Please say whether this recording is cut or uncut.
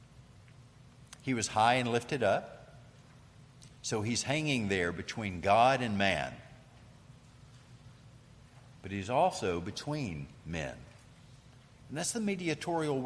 cut